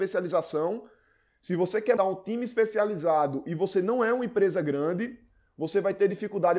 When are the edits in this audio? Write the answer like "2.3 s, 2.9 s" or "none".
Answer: 2.0 s